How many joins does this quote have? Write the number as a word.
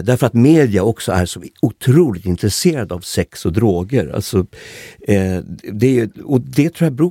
zero